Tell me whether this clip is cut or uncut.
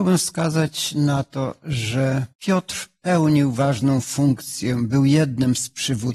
cut